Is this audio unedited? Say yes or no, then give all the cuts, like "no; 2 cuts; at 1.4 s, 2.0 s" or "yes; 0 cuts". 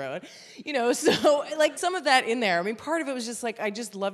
no; 1 cut; at 1.8 s